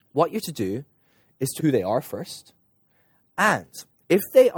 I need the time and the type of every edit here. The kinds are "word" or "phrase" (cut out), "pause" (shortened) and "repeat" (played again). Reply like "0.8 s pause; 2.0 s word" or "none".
1.6 s word